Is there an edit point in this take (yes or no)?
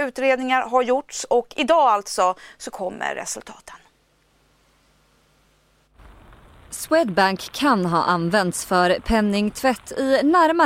no